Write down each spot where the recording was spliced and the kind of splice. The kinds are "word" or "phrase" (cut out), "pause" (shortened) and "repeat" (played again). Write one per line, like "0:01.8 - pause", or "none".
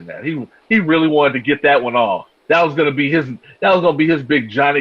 0:02.4 - pause